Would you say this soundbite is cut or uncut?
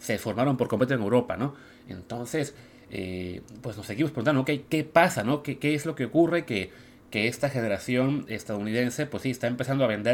uncut